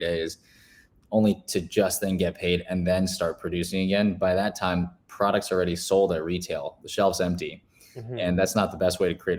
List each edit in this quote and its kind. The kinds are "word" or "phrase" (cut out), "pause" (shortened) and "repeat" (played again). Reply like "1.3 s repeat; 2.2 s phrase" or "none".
none